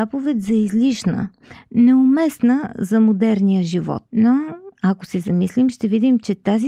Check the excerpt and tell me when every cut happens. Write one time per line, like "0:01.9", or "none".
0:04.1